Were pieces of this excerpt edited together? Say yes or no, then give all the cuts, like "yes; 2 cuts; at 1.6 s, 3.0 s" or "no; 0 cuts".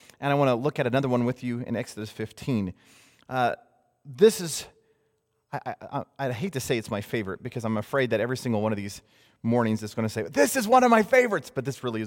no; 0 cuts